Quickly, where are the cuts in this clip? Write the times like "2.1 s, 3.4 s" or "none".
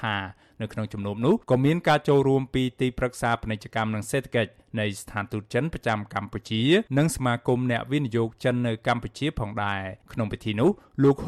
1.4 s, 6.9 s, 10.0 s